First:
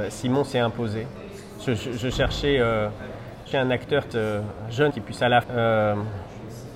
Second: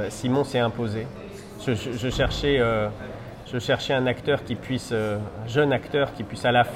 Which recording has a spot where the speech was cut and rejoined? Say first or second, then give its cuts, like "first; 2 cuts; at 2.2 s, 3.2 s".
first; 4 cuts; at 3.5 s, 4.1 s, 4.9 s, 5.4 s